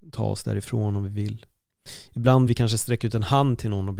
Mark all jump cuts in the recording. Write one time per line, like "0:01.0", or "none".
0:02.5